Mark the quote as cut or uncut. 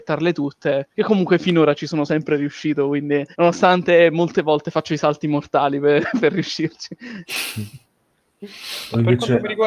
cut